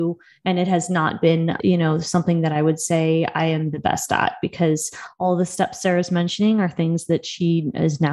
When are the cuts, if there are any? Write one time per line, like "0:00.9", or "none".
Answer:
0:01.6